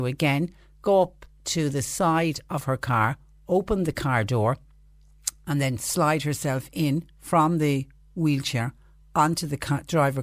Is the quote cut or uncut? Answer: uncut